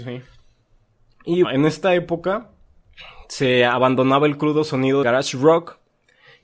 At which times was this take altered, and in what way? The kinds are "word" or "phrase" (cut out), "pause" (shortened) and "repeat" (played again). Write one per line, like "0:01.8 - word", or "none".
0:01.4 - word
0:05.0 - word